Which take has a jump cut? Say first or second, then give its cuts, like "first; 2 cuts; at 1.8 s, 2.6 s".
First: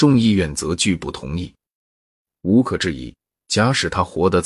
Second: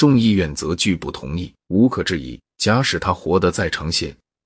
second; 2 cuts; at 1.6 s, 2.5 s